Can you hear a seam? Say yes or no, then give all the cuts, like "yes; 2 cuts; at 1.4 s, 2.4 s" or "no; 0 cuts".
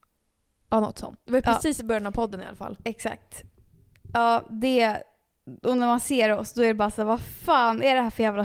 no; 0 cuts